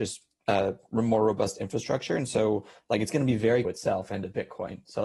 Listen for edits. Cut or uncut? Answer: cut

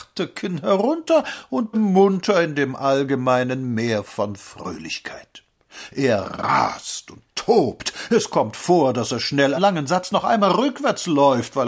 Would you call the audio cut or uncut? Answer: cut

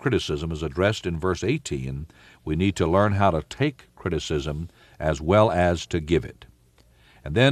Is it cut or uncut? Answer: uncut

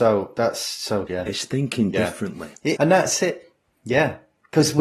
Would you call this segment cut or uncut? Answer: cut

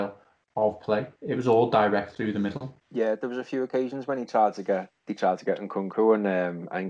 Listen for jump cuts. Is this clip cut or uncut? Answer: cut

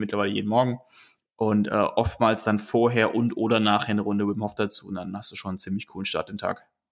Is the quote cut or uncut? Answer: uncut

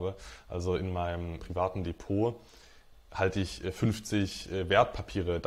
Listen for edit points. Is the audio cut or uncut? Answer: cut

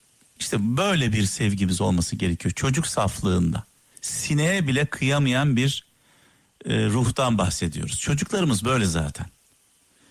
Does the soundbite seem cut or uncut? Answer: uncut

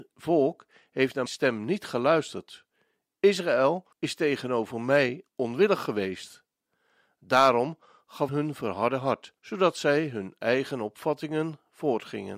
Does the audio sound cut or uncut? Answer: cut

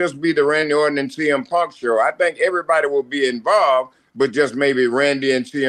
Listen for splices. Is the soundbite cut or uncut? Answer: uncut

